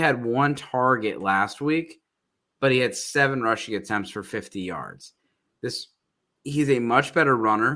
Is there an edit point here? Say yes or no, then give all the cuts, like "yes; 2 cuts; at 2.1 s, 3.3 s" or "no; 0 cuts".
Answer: no; 0 cuts